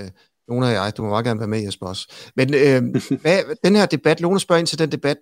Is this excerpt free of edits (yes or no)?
yes